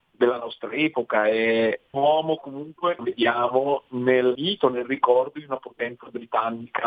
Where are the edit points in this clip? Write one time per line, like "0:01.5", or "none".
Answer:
0:01.9
0:03.0
0:04.3